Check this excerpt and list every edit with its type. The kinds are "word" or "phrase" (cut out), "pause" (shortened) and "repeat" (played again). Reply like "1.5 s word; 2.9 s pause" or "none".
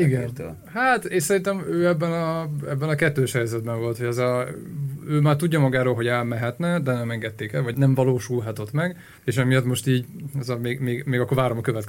7.7 s word; 9.2 s pause